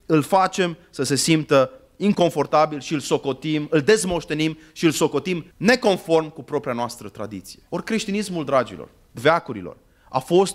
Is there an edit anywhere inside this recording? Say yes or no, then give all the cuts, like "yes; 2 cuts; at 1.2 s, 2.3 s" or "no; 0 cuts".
yes; 3 cuts; at 5.5 s, 7.7 s, 9.2 s